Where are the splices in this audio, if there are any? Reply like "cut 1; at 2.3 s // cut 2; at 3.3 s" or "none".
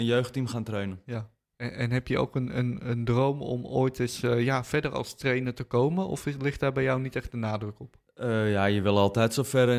none